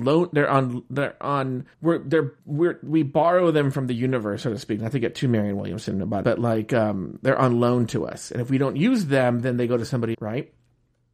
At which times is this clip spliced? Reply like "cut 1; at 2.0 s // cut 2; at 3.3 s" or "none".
cut 1; at 1.7 s // cut 2; at 2.4 s // cut 3; at 6.2 s // cut 4; at 10.1 s